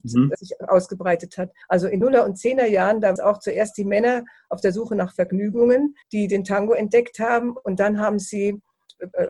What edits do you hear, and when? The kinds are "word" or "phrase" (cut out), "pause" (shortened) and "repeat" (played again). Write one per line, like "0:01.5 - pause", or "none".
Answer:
0:01.6 - pause
0:02.0 - word
0:03.2 - phrase
0:06.0 - pause

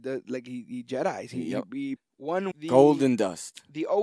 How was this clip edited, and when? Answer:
0:02.0 - word
0:02.5 - word

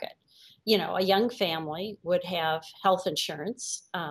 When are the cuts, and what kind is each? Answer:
none

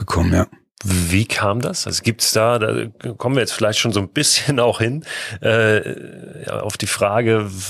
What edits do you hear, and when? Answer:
none

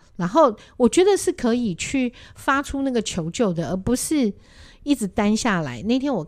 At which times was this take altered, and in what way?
none

